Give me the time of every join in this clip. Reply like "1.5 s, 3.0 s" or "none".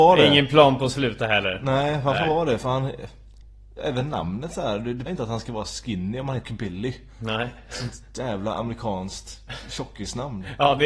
5.1 s, 6.4 s